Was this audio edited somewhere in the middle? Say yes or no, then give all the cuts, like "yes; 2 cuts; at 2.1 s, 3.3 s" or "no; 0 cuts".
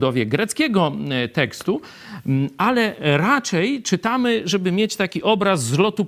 no; 0 cuts